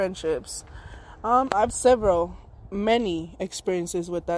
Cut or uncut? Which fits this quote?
cut